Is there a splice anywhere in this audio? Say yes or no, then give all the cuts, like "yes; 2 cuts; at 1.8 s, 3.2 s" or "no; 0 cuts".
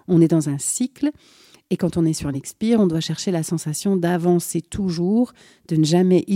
no; 0 cuts